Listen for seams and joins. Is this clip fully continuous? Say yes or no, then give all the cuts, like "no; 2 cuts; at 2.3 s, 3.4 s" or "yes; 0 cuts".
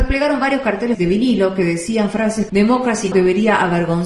no; 3 cuts; at 0.9 s, 2.5 s, 3.1 s